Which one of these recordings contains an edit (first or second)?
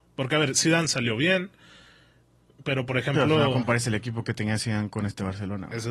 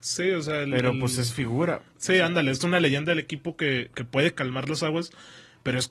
second